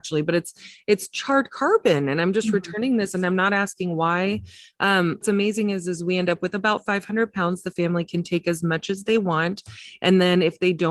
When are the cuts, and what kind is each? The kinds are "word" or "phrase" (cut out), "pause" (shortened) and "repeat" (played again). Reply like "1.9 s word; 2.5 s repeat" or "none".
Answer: 5.2 s word

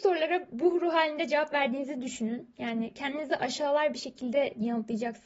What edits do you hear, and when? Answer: none

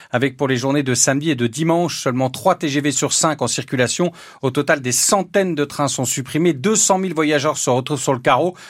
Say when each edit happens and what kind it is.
none

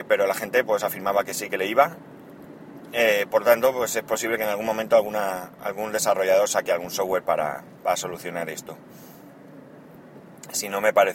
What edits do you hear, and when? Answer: none

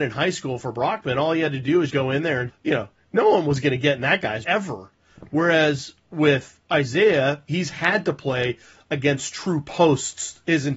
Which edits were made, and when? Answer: 1.9 s word; 2.5 s word; 4.4 s word

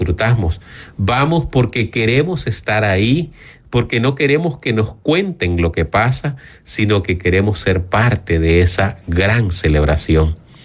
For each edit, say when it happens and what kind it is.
none

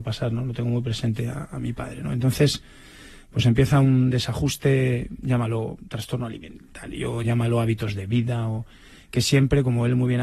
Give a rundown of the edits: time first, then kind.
none

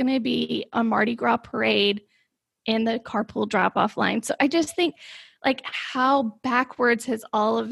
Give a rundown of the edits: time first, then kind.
none

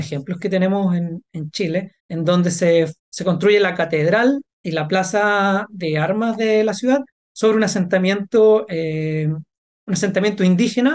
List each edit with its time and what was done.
2.0 s pause; 3.0 s pause; 7.1 s pause

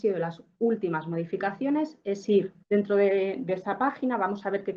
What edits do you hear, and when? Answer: 2.6 s pause

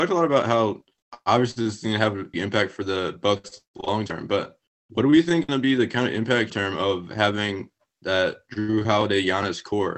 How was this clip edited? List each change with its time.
2.3 s word; 5.5 s word; 6.5 s word

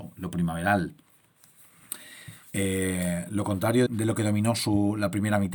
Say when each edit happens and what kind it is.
2.4 s pause; 3.9 s word

